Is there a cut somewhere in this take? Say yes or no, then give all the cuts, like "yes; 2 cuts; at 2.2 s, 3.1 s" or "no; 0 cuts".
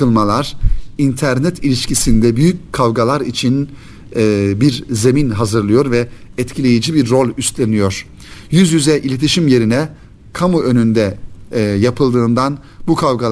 no; 0 cuts